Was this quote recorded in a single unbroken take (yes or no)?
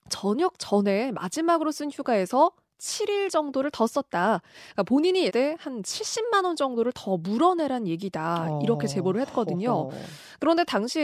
no